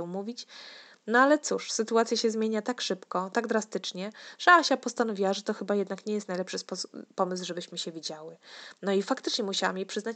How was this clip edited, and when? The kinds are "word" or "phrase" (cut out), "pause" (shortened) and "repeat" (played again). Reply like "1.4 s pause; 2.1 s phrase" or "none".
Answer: none